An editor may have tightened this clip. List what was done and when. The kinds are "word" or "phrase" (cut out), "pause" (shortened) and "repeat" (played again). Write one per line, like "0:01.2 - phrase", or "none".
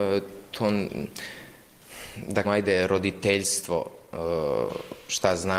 0:02.4 - word

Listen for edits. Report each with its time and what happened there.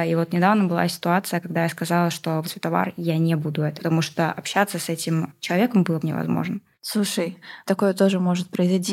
0:02.4 - phrase
0:03.8 - word
0:06.0 - word

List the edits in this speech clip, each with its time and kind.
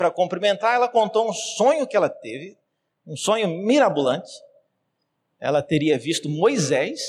none

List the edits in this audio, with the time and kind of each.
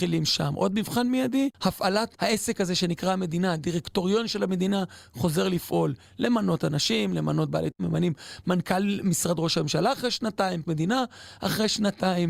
0:01.5 - pause
0:07.7 - word
0:10.6 - word

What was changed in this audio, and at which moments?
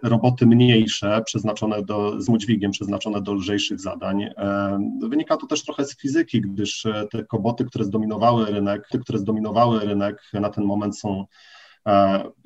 0:02.3 - word
0:08.9 - repeat

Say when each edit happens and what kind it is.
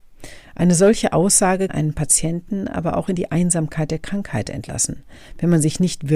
0:01.7 - word

